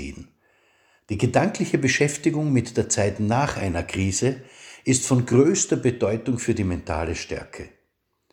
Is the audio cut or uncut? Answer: uncut